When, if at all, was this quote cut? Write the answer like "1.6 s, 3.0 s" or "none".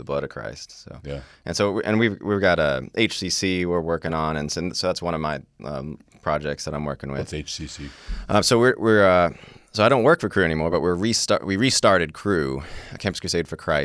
none